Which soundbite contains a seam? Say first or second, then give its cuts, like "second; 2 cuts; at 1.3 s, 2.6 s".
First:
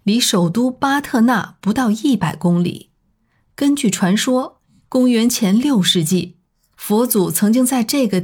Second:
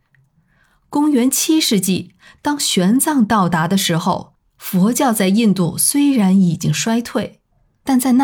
first; 1 cut; at 3.1 s